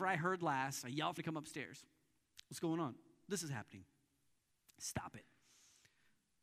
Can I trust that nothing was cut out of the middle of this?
no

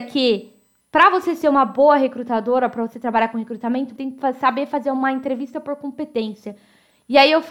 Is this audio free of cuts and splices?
no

